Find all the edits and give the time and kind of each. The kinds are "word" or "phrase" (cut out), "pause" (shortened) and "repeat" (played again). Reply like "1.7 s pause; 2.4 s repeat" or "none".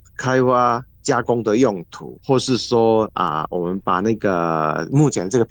2.2 s pause